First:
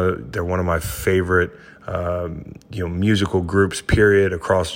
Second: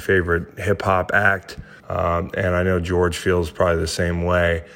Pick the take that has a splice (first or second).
second